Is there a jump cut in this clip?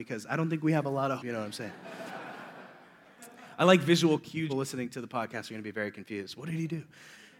yes; 2 cuts; at 1.2 s, 4.5 s

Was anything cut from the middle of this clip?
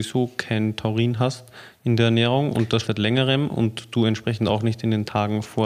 yes; 1 cut; at 2.8 s

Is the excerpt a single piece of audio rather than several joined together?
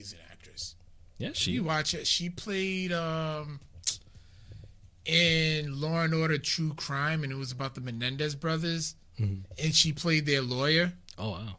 yes; 0 cuts

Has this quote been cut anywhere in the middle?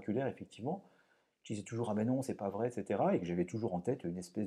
no; 0 cuts

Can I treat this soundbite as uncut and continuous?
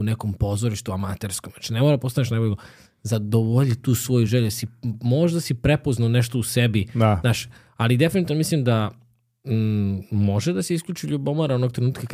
yes; 0 cuts

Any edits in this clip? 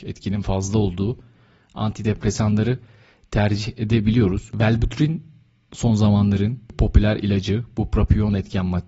no; 0 cuts

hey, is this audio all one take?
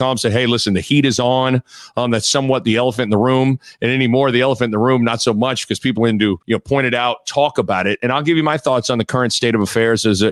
no; 2 cuts; at 6.0 s, 6.4 s

